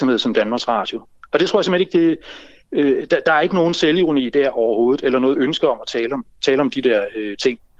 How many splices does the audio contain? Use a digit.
0